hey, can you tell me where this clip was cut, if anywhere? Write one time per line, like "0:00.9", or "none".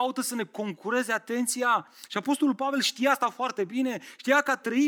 none